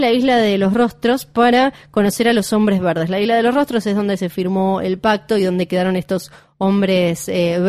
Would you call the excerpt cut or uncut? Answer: uncut